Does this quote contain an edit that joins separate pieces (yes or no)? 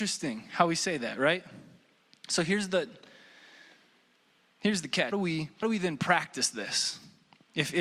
yes